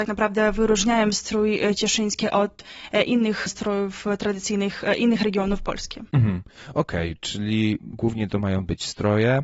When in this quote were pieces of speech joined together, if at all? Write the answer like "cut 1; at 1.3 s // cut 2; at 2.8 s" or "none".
none